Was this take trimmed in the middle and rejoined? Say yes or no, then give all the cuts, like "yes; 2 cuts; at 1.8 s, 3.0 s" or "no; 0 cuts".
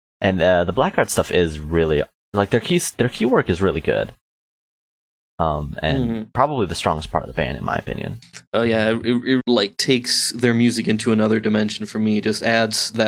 yes; 1 cut; at 9.4 s